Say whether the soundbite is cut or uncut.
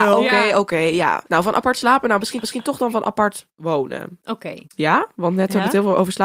cut